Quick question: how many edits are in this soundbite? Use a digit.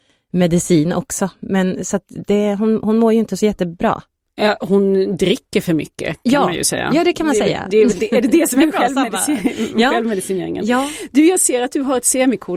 0